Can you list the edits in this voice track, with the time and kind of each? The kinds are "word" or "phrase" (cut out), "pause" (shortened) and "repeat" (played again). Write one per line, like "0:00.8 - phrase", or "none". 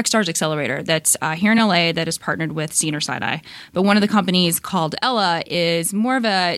none